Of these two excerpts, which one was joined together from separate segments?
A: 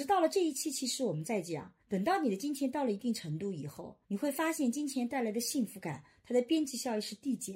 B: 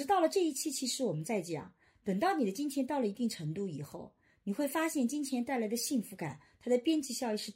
A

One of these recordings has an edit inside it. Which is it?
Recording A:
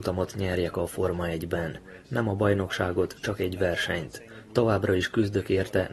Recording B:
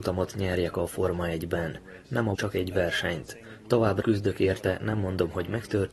B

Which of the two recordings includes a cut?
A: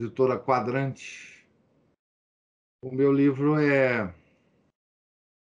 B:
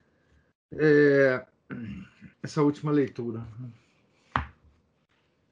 B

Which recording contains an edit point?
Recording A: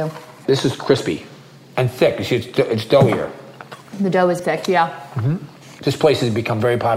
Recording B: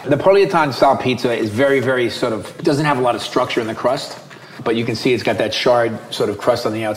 A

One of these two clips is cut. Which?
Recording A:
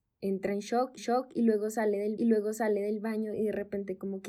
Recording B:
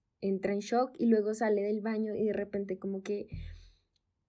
A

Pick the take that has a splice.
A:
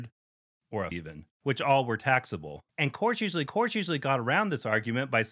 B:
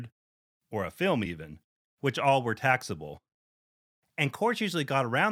A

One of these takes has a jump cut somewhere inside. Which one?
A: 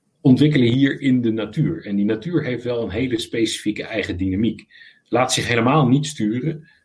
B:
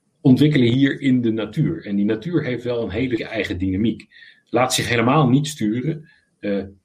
B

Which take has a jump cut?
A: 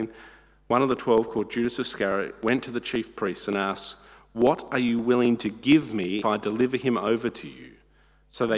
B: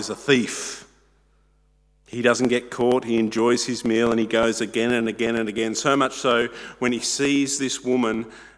A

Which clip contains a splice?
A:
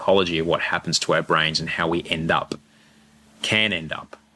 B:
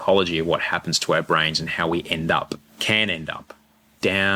B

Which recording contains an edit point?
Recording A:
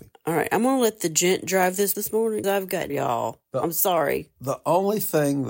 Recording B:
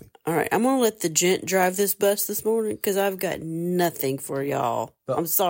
A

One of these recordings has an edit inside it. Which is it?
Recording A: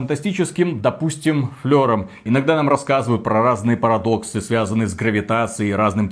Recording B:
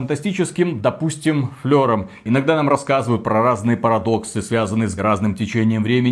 B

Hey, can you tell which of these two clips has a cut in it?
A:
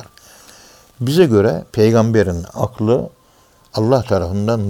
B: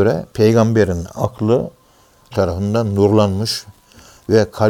B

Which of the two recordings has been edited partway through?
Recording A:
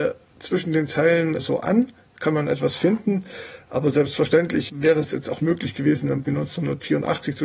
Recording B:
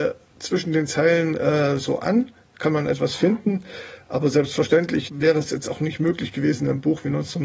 A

